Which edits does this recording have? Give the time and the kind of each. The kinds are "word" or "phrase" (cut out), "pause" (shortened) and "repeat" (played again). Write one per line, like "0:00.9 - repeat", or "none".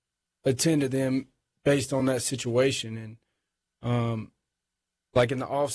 none